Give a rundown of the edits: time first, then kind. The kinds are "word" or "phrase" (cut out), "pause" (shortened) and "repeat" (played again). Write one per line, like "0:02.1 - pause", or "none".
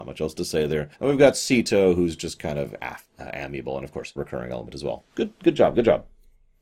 0:00.9 - pause
0:04.2 - phrase